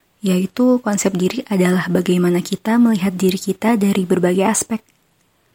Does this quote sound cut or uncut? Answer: uncut